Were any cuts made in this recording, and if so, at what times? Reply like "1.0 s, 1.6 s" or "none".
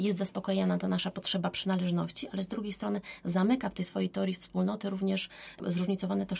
none